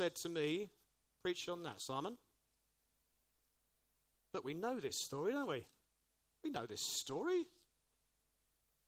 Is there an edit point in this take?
no; 0 cuts

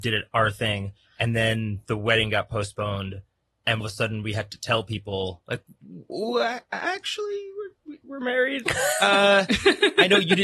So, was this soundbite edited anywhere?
yes; 1 cut; at 3.8 s

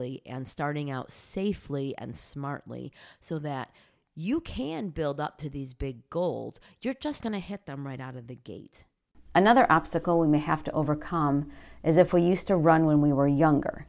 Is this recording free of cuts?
no; 1 cut; at 7.2 s

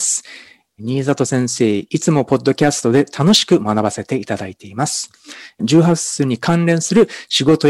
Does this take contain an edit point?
yes; 1 cut; at 1.9 s

